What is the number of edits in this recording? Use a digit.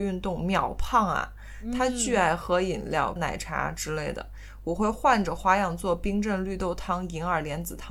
1